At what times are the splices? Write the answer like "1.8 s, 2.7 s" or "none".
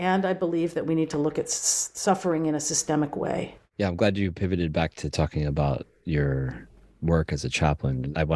none